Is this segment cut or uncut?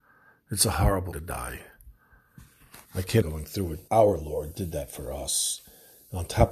cut